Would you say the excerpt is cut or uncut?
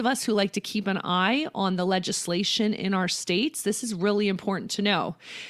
uncut